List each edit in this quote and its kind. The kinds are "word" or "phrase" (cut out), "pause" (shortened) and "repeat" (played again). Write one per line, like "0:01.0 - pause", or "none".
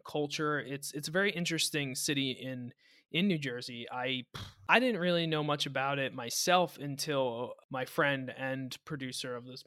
none